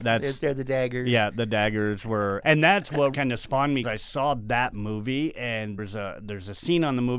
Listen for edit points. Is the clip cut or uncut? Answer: cut